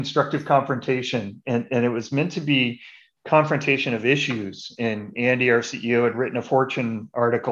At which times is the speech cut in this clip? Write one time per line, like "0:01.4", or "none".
none

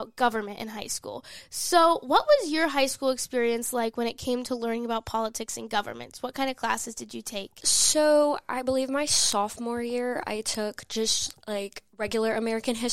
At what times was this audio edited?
0:11.9

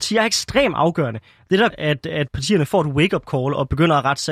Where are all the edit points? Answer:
0:01.7
0:02.3

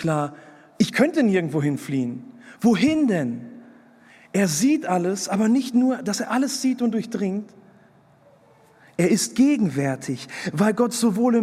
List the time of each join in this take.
none

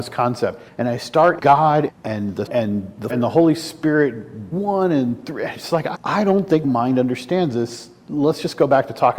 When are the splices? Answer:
0:01.4
0:01.9
0:02.5
0:03.1
0:04.5
0:05.9
0:06.6

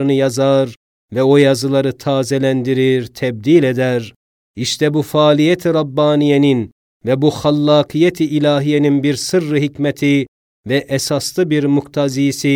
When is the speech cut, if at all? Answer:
none

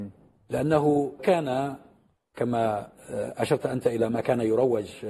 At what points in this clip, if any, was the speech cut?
0:01.2

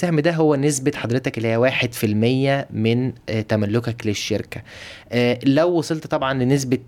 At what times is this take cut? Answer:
none

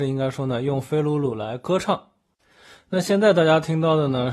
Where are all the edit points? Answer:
none

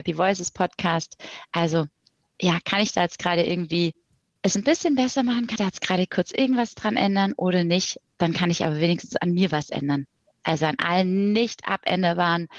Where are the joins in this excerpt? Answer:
0:05.6

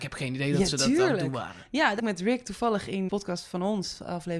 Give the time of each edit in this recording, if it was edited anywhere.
0:02.0
0:03.1

